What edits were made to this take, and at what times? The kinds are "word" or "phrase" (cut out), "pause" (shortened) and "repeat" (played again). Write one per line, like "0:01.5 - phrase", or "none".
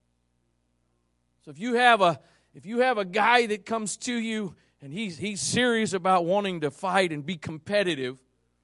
none